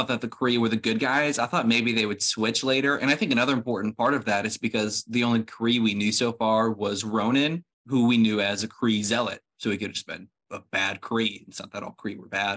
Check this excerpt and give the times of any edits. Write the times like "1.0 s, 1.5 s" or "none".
7.7 s

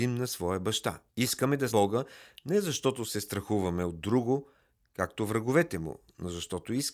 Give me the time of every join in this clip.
1.1 s, 1.7 s

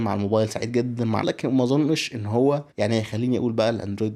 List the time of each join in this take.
1.2 s, 2.7 s

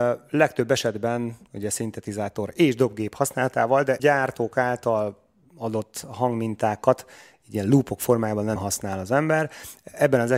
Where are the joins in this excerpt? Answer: 4.0 s, 8.6 s

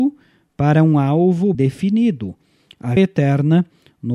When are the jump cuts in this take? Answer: 1.5 s, 3.0 s

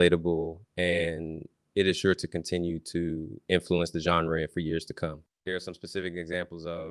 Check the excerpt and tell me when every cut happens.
none

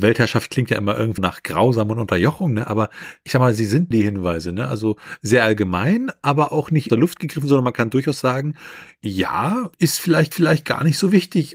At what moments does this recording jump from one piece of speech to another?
1.2 s, 3.9 s, 6.9 s, 9.7 s, 10.3 s

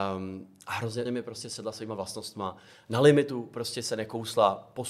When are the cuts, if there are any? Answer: 1.0 s

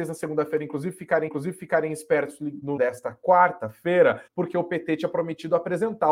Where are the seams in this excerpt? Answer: 1.3 s, 2.8 s, 4.3 s

